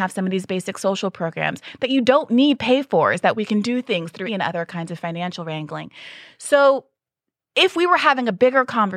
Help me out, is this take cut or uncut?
cut